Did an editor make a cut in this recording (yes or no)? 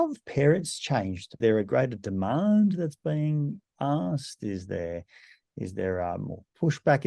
yes